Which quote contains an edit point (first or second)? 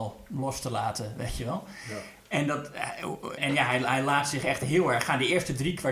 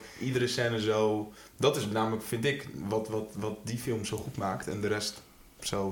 first